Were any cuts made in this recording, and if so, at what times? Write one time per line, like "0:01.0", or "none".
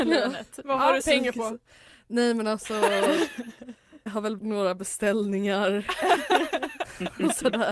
0:01.0
0:04.1
0:04.4